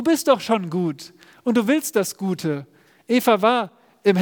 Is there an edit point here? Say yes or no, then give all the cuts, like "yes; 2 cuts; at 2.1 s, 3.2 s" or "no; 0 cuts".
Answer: no; 0 cuts